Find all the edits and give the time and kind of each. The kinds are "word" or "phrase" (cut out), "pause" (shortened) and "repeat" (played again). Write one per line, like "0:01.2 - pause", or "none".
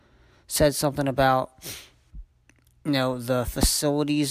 none